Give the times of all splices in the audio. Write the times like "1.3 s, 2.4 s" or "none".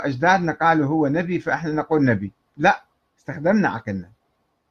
2.9 s